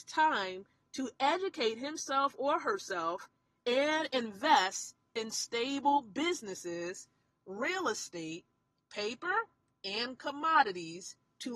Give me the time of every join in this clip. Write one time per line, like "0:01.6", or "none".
none